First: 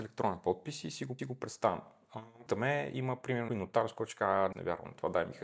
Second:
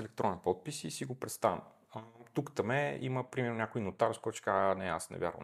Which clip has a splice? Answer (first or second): first